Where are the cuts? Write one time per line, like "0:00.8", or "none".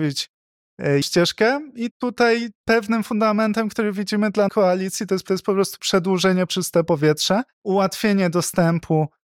0:01.0
0:01.9
0:02.6
0:04.5
0:05.3
0:06.5
0:07.5